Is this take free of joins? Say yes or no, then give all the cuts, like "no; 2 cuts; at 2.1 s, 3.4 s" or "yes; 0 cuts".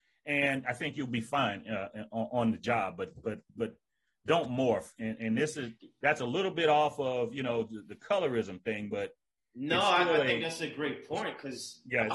no; 1 cut; at 3.5 s